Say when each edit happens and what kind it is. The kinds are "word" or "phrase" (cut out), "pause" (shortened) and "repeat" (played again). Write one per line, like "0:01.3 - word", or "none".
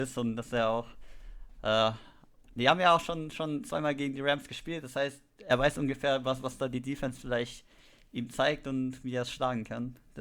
none